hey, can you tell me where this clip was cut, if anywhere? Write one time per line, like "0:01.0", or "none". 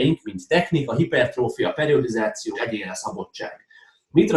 0:02.5